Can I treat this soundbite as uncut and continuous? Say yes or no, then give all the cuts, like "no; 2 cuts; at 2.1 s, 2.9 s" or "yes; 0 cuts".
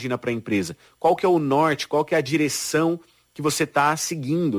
yes; 0 cuts